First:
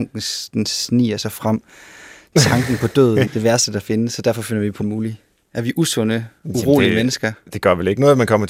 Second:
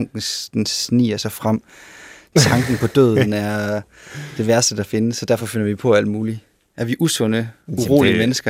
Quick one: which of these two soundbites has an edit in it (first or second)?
first